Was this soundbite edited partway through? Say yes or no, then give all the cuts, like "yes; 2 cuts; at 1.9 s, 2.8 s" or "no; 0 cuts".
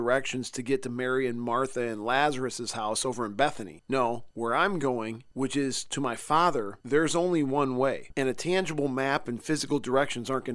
no; 0 cuts